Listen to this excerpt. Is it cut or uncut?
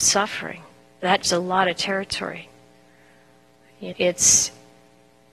cut